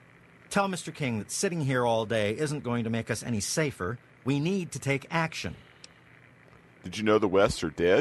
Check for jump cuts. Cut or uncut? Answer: uncut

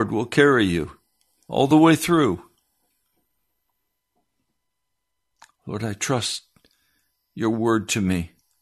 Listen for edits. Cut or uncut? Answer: uncut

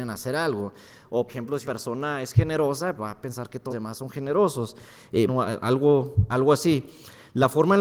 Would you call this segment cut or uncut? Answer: cut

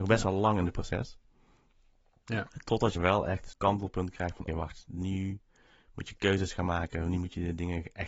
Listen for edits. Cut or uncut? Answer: cut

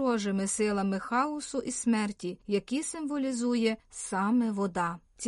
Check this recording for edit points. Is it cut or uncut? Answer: uncut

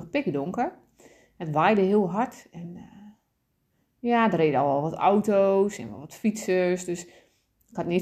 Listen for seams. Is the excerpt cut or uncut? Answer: uncut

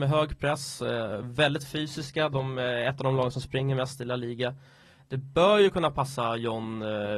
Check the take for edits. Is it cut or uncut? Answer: uncut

